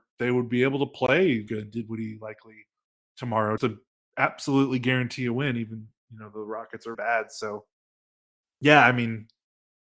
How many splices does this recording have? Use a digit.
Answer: 3